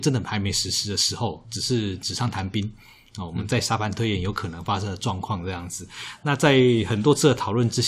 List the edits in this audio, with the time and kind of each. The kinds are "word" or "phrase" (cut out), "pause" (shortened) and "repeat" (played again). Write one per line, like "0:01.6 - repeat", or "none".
none